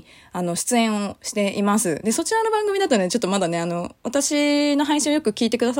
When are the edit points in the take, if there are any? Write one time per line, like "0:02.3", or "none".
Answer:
none